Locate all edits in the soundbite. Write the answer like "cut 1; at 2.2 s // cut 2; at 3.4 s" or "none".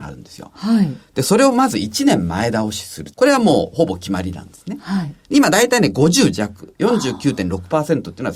cut 1; at 3.1 s